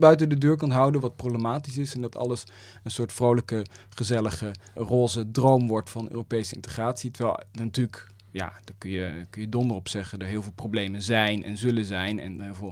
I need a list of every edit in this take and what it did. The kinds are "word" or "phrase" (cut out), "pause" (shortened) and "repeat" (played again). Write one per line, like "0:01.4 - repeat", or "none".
0:04.8 - word